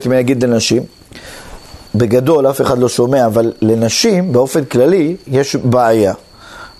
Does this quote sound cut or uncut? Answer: cut